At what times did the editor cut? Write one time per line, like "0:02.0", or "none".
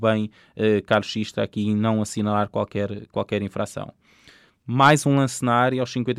none